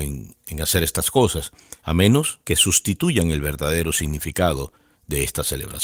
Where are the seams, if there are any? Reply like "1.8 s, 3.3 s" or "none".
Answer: 1.8 s, 2.4 s